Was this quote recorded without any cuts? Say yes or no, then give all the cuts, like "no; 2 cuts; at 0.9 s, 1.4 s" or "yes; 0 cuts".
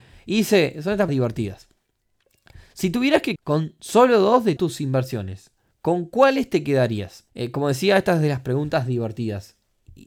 no; 5 cuts; at 1.1 s, 3.4 s, 4.6 s, 5.7 s, 7.3 s